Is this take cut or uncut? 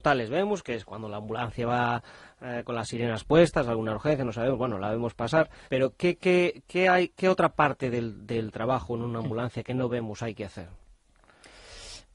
cut